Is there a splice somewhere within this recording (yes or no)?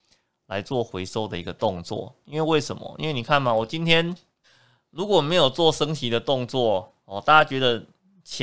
yes